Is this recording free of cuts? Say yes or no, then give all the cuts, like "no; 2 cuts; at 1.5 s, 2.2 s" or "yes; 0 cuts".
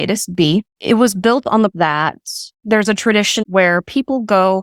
no; 2 cuts; at 1.7 s, 3.4 s